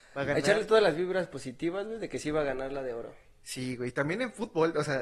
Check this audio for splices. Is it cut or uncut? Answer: uncut